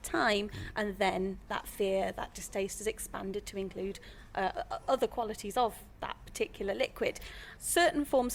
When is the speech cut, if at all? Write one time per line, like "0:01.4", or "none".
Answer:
0:01.5